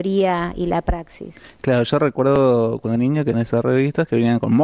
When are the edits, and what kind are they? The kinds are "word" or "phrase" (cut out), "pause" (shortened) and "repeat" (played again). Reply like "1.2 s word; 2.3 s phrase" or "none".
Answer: 3.0 s word; 3.3 s word